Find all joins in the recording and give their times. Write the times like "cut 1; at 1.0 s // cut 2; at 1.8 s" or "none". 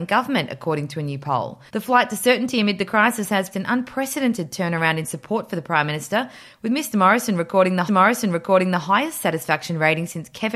cut 1; at 1.7 s // cut 2; at 3.5 s // cut 3; at 7.9 s